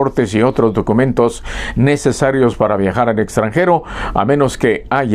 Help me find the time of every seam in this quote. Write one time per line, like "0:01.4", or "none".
none